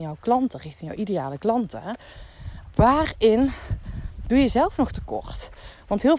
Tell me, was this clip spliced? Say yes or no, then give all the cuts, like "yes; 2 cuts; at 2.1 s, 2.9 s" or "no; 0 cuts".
no; 0 cuts